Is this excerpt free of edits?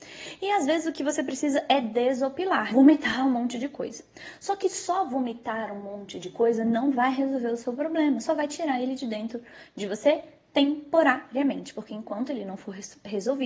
no; 1 cut; at 2.7 s

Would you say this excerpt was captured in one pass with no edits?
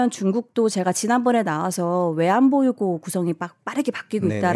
yes; 0 cuts

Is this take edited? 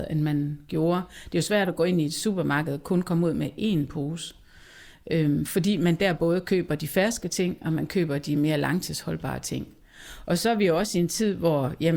no; 0 cuts

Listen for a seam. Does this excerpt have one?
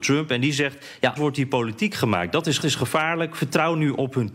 yes; 2 cuts; at 1.2 s, 2.6 s

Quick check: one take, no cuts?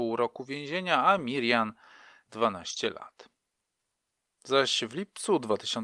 no; 1 cut; at 2.3 s

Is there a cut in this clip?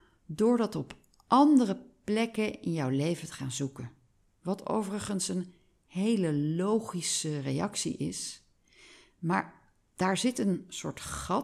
no; 0 cuts

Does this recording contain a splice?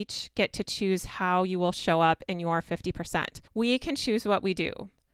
yes; 1 cut; at 3.5 s

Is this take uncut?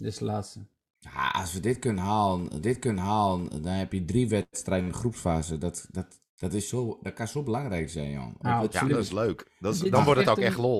no; 2 cuts; at 2.6 s, 9.6 s

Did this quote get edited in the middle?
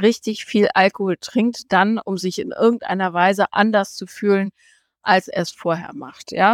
no; 0 cuts

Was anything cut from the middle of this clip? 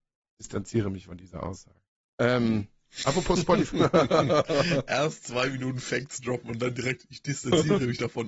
yes; 1 cut; at 1.8 s

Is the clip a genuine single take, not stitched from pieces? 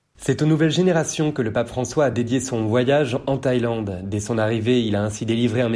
yes; 0 cuts

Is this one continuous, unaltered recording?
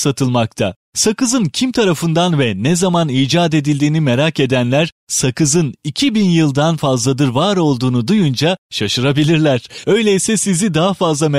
yes; 0 cuts

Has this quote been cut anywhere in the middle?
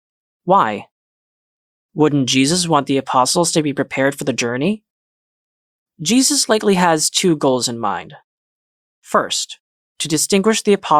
no; 0 cuts

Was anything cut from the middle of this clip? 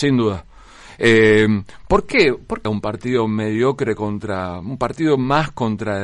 yes; 1 cut; at 2.7 s

